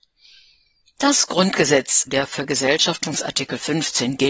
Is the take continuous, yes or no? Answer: no